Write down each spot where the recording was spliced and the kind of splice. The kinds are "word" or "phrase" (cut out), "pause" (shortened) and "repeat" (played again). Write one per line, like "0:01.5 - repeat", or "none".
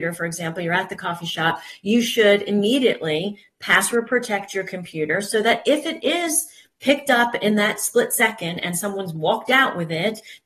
none